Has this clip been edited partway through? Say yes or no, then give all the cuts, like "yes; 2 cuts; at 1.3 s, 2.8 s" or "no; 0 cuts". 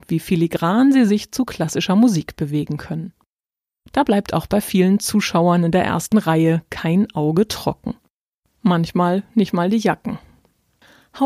no; 0 cuts